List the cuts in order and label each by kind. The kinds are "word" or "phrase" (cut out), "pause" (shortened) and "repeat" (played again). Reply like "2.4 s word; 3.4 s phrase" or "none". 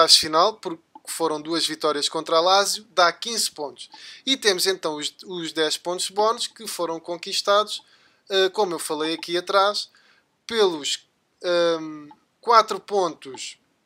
none